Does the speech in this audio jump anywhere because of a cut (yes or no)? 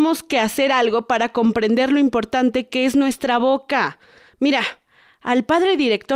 no